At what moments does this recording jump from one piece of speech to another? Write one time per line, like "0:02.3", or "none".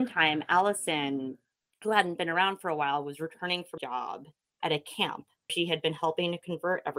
0:03.8
0:05.5